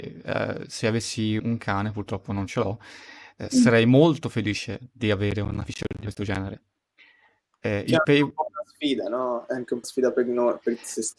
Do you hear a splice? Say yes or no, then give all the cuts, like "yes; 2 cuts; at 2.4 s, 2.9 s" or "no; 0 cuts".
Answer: yes; 2 cuts; at 1.4 s, 9.8 s